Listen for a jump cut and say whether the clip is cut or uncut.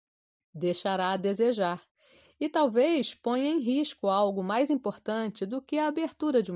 uncut